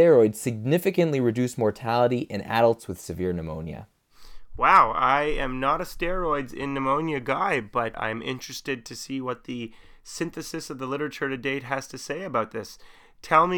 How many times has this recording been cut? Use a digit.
0